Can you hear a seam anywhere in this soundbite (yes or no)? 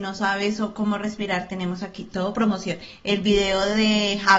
no